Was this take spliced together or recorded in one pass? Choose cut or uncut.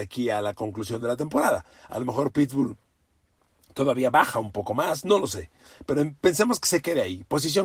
uncut